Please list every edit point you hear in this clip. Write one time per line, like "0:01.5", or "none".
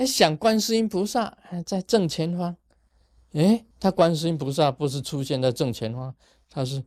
0:03.7